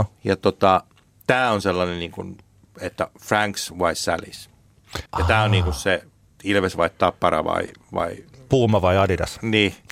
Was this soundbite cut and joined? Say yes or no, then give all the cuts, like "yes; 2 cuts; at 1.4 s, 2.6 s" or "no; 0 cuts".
yes; 1 cut; at 5.1 s